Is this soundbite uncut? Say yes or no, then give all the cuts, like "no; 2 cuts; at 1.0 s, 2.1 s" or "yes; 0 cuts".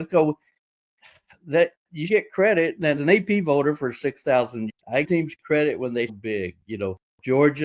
no; 5 cuts; at 2.1 s, 3.0 s, 4.7 s, 5.0 s, 6.1 s